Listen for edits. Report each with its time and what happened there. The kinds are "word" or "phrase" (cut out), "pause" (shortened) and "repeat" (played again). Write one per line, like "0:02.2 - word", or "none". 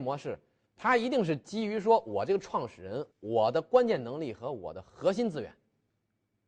0:03.1 - pause